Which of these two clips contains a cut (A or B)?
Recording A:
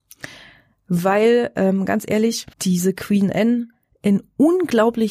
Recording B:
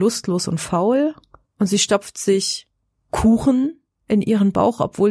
A